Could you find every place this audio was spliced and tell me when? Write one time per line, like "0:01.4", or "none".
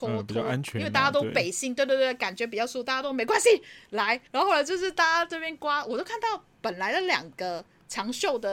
0:04.3
0:06.5